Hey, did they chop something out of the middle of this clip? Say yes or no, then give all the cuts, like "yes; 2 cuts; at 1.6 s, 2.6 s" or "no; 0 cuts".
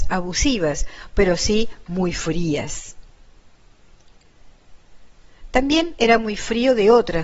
no; 0 cuts